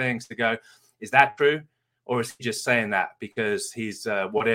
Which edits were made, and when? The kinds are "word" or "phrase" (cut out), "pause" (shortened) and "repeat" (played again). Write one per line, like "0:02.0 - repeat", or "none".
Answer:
none